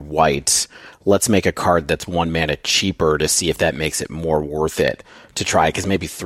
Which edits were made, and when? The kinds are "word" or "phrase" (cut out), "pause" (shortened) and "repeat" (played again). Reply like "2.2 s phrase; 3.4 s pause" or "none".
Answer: none